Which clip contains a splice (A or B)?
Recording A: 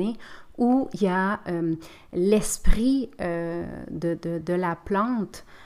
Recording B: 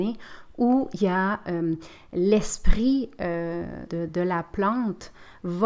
B